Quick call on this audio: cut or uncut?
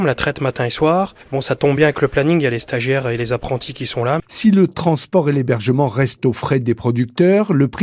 uncut